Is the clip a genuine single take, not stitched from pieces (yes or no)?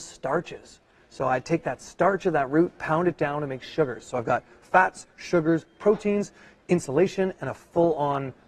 yes